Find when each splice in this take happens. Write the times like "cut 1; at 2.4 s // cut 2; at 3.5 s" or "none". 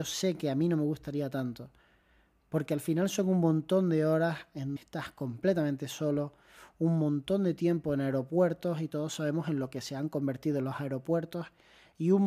cut 1; at 4.8 s